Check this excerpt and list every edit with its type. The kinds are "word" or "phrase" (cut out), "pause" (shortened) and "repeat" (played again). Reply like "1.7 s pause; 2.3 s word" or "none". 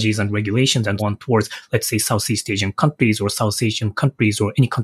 1.0 s word